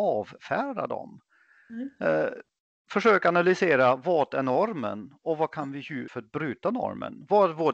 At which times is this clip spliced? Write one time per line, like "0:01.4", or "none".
0:06.1